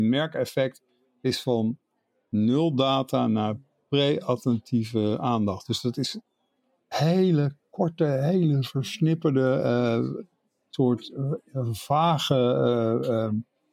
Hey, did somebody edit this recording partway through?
no; 0 cuts

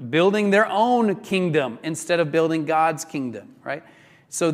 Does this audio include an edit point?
no; 0 cuts

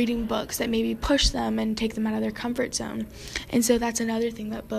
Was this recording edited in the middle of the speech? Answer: no; 0 cuts

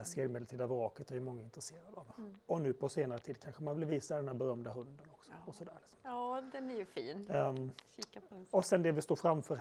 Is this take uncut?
yes; 0 cuts

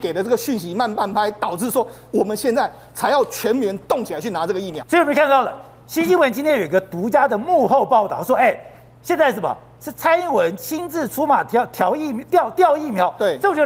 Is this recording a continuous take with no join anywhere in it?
yes; 0 cuts

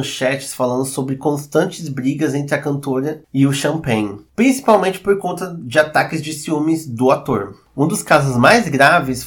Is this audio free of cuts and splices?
yes; 0 cuts

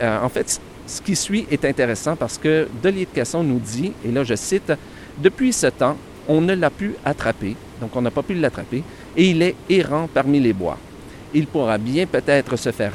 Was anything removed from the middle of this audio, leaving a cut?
no; 0 cuts

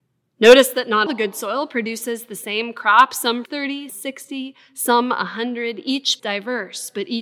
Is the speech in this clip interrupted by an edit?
yes; 4 cuts; at 1.1 s, 3.5 s, 3.9 s, 6.2 s

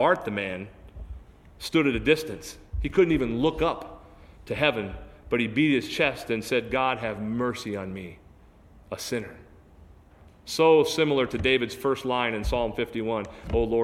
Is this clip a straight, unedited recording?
yes; 0 cuts

